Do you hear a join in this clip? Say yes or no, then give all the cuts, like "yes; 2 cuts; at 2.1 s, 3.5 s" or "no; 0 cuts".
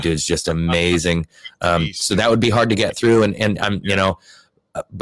no; 0 cuts